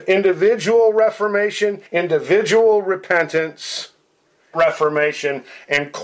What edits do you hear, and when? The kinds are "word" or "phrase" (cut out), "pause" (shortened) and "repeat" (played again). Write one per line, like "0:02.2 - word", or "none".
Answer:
0:01.9 - pause
0:04.5 - phrase